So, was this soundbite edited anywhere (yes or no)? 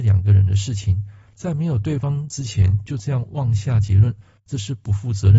no